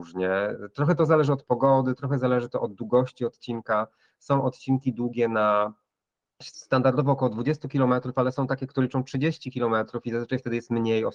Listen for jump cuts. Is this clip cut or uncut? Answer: uncut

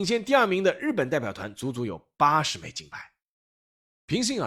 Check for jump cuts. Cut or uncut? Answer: uncut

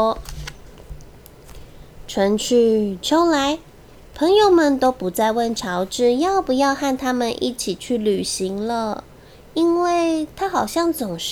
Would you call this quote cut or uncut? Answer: uncut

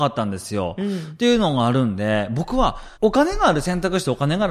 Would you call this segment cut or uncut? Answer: cut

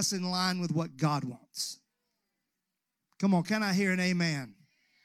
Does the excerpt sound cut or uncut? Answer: uncut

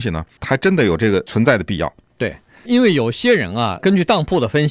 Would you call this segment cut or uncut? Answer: cut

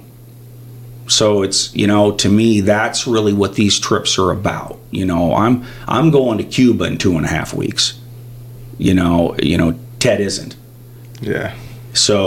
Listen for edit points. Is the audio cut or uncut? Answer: uncut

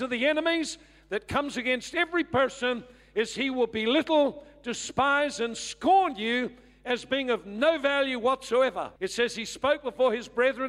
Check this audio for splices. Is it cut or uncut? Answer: cut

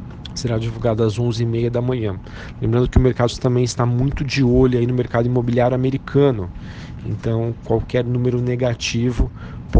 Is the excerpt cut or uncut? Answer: uncut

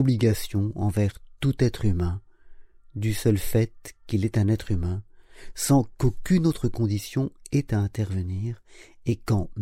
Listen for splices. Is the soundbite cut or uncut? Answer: uncut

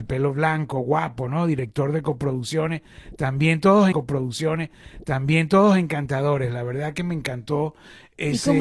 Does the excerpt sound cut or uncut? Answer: cut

